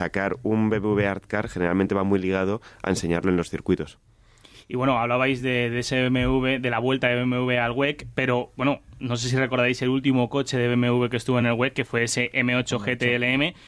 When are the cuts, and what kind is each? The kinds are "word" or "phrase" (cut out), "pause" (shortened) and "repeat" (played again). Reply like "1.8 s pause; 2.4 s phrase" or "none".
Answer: none